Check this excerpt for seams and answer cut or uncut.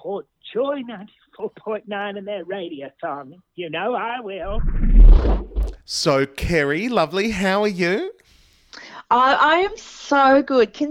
uncut